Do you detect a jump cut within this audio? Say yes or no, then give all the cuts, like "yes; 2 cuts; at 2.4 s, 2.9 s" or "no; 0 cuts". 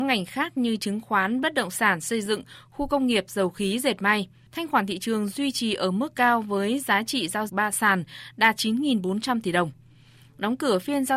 yes; 1 cut; at 7.5 s